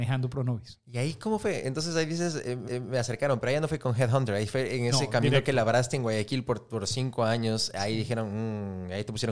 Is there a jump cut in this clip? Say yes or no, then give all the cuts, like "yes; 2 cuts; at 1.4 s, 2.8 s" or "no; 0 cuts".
yes; 1 cut; at 2.7 s